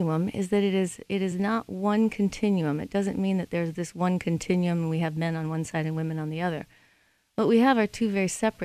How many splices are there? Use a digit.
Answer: 0